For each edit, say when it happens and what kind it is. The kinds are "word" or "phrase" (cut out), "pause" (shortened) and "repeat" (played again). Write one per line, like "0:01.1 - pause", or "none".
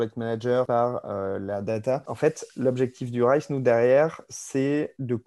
none